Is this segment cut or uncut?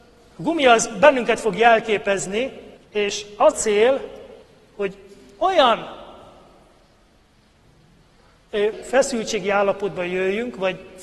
cut